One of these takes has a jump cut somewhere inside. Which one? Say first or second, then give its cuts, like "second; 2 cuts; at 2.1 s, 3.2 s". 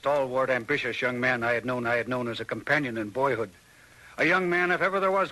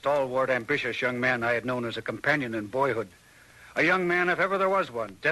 first; 1 cut; at 1.8 s